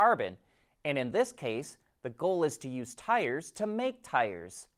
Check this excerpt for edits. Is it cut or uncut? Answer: uncut